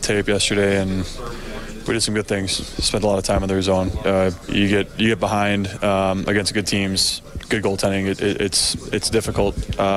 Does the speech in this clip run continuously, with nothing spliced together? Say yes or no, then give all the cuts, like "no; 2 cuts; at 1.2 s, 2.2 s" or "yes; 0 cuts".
no; 1 cut; at 4.5 s